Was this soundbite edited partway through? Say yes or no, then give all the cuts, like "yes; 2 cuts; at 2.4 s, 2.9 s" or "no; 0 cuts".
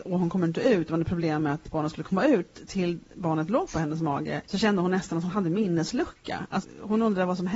yes; 3 cuts; at 3.7 s, 4.4 s, 6.6 s